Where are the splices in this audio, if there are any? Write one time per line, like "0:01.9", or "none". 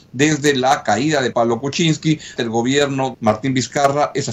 0:01.3
0:02.4
0:03.1